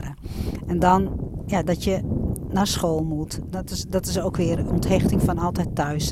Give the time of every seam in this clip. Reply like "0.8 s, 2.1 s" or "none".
none